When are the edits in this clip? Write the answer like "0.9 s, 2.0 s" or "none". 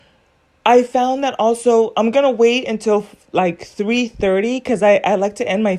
none

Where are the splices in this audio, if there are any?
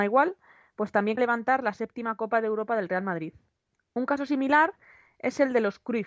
1.2 s

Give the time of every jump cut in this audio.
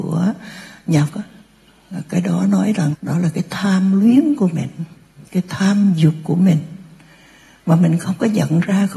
1.1 s, 2.9 s, 5.3 s

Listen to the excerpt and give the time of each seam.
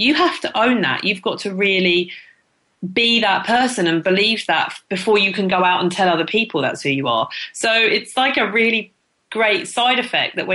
none

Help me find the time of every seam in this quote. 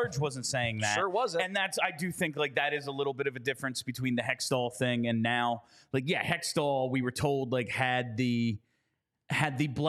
none

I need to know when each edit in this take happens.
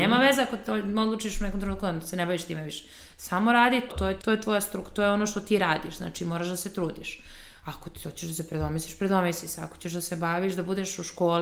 3.9 s, 4.2 s

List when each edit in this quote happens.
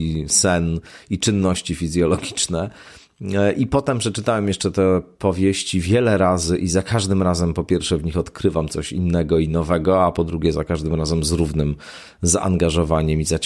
none

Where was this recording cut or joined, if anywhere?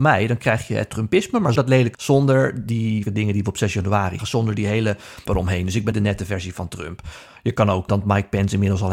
1.6 s, 1.9 s, 3.1 s, 4.2 s, 5.3 s, 5.9 s, 7.9 s

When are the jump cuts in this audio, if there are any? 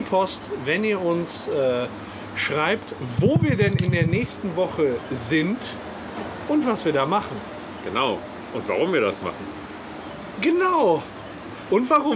none

